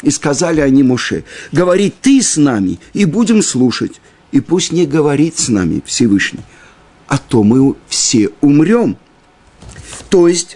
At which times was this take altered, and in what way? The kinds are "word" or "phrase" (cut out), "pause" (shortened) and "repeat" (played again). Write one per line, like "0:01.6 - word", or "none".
none